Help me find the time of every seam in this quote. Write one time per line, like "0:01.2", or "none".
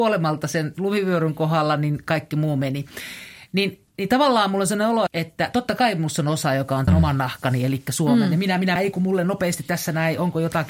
0:05.1
0:06.9
0:08.8